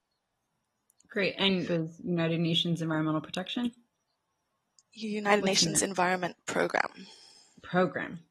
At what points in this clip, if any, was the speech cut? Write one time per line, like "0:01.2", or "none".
0:01.7